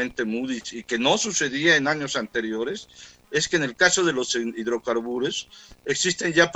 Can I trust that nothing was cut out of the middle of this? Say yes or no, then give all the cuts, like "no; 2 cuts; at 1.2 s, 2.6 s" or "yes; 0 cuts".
yes; 0 cuts